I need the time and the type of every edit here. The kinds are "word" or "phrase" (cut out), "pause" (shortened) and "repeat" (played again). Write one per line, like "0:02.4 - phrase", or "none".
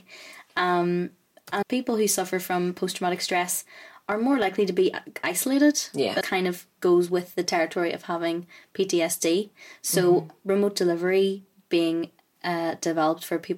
0:01.6 - word
0:06.2 - word